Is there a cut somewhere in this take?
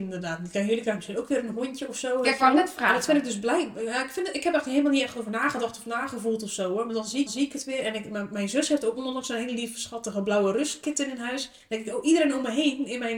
yes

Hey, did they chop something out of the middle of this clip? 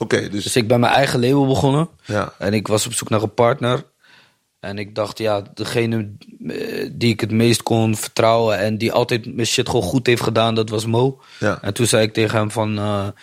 no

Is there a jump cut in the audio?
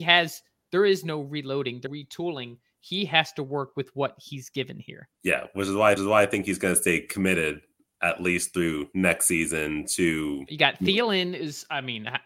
yes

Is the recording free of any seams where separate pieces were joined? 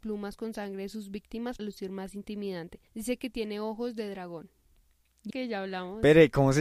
no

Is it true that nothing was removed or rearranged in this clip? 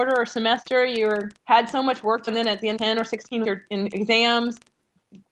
no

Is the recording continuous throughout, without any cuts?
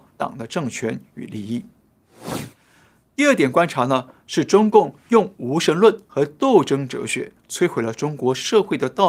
yes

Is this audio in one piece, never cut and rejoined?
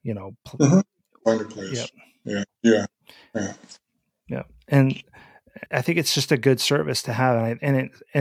no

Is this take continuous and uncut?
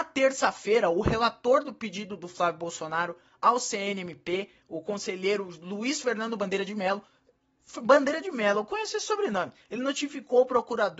yes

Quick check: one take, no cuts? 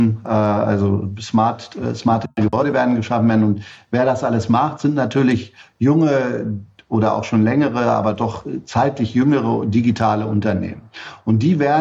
yes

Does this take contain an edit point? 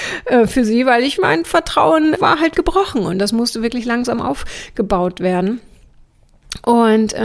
yes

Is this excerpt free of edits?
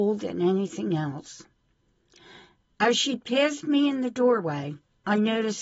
yes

